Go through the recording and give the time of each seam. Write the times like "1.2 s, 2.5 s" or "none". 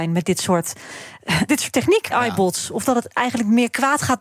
1.5 s, 2.1 s